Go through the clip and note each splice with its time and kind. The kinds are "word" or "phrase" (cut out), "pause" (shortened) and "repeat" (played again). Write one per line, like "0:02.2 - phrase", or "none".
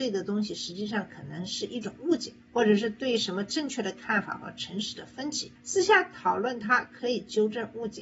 0:02.4 - pause
0:05.6 - pause